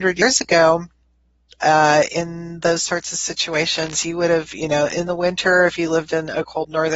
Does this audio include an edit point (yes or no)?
no